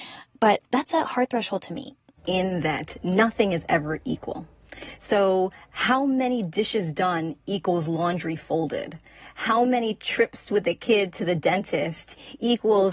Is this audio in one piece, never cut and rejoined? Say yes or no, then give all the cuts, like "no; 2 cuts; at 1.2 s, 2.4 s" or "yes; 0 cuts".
yes; 0 cuts